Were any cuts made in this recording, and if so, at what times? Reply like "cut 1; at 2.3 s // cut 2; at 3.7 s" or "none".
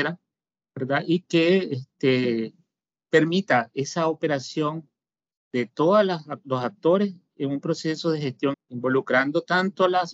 cut 1; at 8.5 s